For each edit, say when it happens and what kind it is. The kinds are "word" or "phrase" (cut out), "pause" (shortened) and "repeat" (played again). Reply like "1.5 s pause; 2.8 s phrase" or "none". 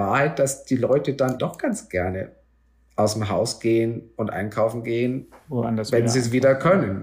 1.4 s word